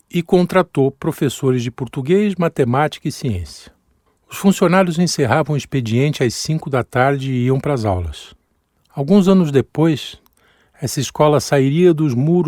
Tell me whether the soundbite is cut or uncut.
uncut